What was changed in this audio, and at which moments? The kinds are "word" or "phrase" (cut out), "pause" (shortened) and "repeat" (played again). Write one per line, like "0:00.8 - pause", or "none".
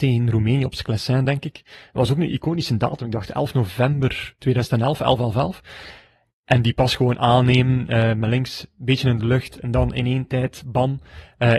none